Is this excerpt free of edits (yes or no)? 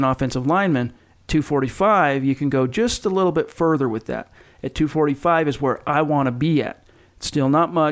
yes